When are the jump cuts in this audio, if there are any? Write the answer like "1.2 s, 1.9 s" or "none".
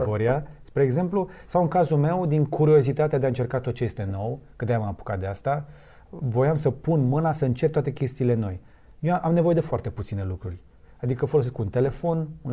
none